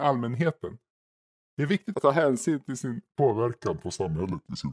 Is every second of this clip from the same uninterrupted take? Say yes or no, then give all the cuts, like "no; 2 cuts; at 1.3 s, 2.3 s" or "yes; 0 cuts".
no; 1 cut; at 1.9 s